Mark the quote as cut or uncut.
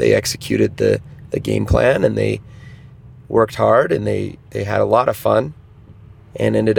uncut